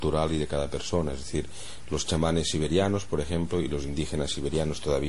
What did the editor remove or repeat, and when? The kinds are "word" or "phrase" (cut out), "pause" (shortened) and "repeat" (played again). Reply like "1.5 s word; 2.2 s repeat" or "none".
none